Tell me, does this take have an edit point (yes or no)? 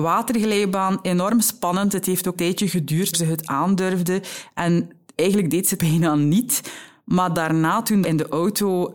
yes